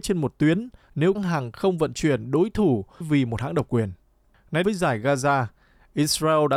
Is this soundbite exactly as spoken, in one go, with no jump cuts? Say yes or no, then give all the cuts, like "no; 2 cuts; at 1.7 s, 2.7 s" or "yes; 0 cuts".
no; 3 cuts; at 1.1 s, 3.0 s, 4.6 s